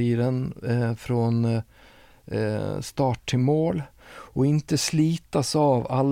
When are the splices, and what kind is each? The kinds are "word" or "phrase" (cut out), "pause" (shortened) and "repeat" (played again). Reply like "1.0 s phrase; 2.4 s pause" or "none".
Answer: none